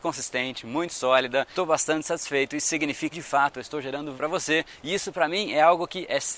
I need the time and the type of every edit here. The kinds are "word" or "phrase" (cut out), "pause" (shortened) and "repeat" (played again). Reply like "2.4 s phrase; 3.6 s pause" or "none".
3.1 s word; 4.2 s word